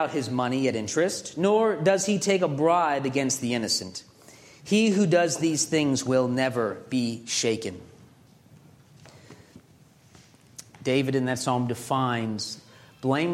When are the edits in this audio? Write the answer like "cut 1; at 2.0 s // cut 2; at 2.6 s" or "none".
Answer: none